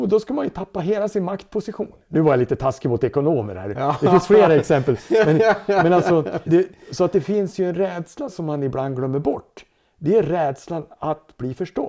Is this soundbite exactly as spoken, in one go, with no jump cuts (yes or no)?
no